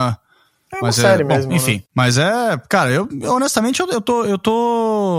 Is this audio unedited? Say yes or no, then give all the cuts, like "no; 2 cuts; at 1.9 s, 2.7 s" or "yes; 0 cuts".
no; 1 cut; at 1.9 s